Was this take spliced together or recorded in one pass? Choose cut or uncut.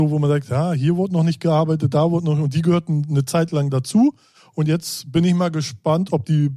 uncut